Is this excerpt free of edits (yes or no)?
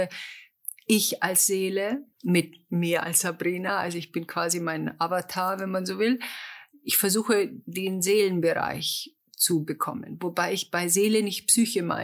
no